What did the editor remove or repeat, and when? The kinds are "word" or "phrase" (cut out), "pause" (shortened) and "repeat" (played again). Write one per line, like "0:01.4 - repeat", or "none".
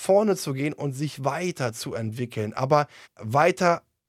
0:03.0 - pause